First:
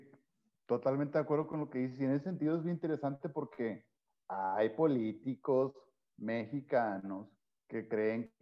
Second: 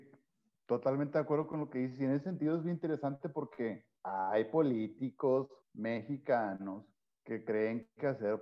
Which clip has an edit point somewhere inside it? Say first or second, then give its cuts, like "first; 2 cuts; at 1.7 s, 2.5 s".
second; 2 cuts; at 4.0 s, 5.6 s